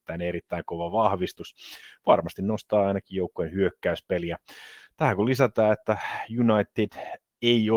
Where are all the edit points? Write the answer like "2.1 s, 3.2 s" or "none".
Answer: none